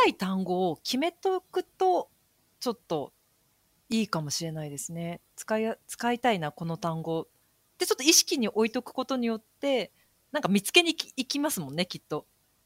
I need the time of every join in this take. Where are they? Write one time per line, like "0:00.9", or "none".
none